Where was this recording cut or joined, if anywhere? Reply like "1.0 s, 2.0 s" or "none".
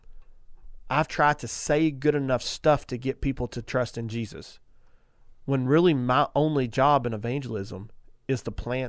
none